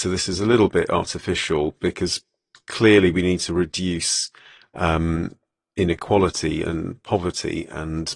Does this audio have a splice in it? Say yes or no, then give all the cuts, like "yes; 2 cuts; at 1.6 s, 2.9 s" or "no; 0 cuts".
no; 0 cuts